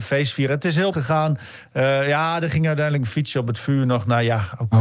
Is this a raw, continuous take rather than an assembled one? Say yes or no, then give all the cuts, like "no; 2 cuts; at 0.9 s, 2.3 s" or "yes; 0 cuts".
no; 1 cut; at 0.9 s